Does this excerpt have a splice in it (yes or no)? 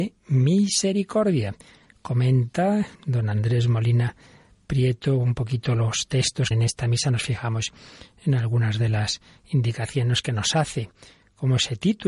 yes